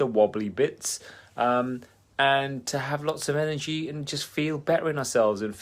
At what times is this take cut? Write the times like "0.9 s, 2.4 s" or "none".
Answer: none